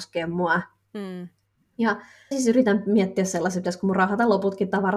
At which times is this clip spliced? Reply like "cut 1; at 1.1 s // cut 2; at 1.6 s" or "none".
cut 1; at 2.3 s